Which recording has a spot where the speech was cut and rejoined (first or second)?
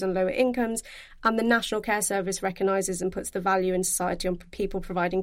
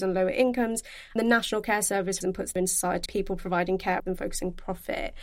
second